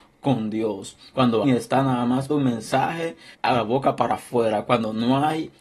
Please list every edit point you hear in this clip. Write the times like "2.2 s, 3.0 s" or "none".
1.4 s, 2.3 s, 3.3 s